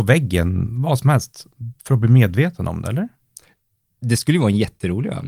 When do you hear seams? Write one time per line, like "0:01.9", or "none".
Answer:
0:01.8